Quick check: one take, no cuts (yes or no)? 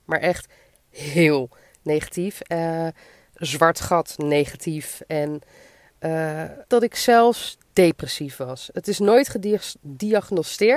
no